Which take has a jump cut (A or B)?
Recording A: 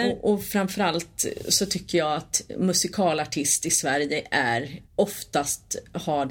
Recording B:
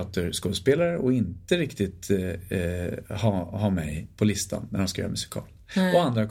A